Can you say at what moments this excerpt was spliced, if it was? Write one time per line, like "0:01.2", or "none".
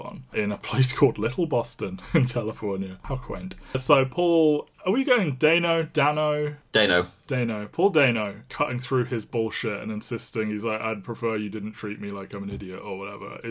none